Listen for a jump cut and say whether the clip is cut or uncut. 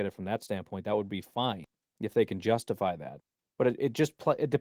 uncut